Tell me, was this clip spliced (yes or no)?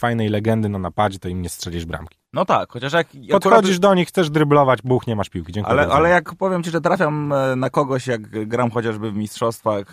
yes